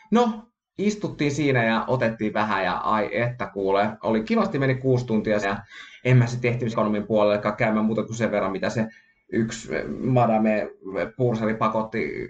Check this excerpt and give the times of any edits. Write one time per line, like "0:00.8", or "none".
0:04.2
0:05.4
0:06.7